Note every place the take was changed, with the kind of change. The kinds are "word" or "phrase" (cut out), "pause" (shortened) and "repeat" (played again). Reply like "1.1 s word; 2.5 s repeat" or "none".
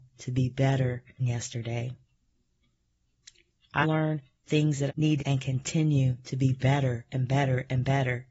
1.2 s phrase; 3.8 s word; 4.9 s phrase; 5.2 s phrase